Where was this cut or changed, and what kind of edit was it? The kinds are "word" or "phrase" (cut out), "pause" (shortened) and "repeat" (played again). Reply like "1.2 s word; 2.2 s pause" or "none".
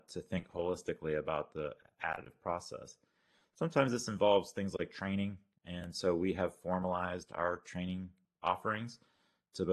none